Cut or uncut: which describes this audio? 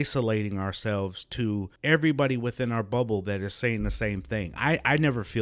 cut